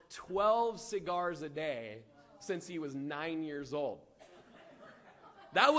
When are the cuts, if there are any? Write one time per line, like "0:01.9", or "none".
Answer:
none